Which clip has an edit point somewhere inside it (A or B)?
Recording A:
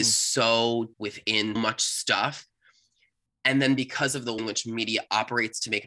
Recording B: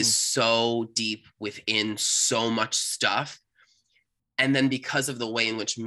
A